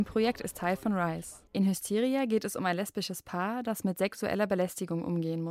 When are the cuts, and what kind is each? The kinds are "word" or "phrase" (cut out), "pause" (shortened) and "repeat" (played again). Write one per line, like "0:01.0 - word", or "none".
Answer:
0:01.5 - pause

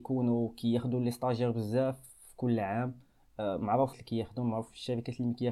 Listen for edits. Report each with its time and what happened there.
0:03.9 - word

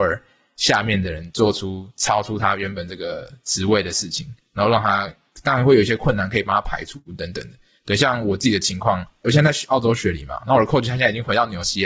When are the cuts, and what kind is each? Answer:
none

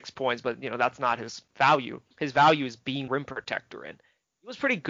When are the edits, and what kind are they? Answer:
0:02.1 - pause
0:03.1 - word

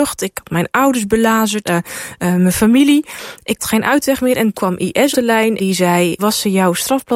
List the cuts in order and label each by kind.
0:01.7 - word
0:03.6 - word
0:04.5 - word
0:05.1 - word
0:05.6 - word
0:06.2 - word

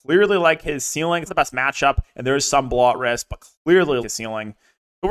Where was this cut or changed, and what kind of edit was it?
0:01.3 - word
0:04.0 - word

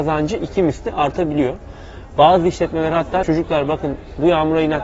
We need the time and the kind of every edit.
0:03.2 - word

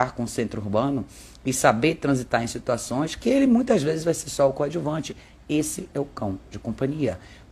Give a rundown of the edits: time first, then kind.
none

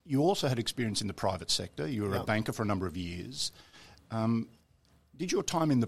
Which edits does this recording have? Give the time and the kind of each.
none

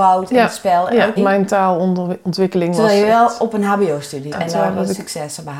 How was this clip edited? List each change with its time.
0:01.2 - word
0:04.3 - word

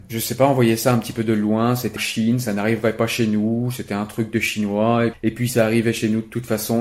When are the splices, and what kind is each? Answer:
0:02.0 - word
0:05.1 - word
0:05.5 - word

